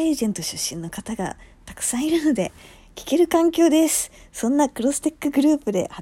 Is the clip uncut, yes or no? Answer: yes